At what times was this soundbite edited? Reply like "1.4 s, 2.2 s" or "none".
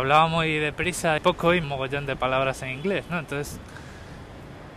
1.2 s, 1.6 s